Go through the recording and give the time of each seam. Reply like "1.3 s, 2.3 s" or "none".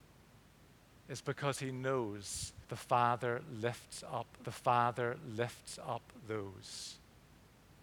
2.6 s, 4.4 s